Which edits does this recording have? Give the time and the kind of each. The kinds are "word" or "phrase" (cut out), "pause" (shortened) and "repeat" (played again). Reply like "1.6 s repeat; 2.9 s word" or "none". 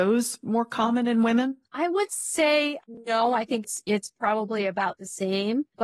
1.6 s pause